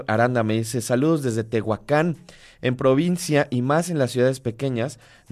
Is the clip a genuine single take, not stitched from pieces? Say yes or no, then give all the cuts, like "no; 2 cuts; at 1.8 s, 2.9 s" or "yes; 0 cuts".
yes; 0 cuts